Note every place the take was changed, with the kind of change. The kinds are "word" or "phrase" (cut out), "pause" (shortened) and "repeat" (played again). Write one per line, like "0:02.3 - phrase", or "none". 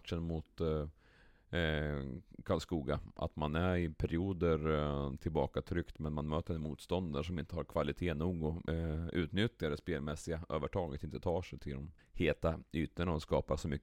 0:08.7 - pause
0:12.0 - pause